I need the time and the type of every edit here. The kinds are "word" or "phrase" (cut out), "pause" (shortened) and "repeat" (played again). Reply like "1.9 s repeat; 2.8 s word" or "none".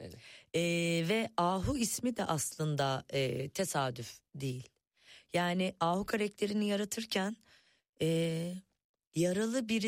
none